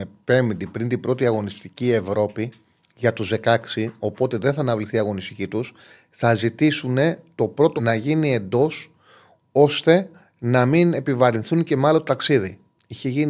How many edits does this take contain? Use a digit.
1